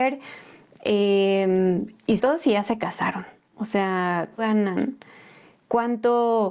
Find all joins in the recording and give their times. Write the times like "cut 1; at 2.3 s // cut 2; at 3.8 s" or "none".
cut 1; at 2.2 s // cut 2; at 4.4 s